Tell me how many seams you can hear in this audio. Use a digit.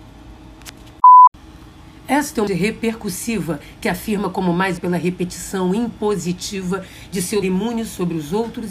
4